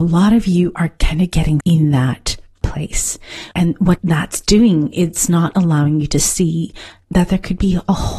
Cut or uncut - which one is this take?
cut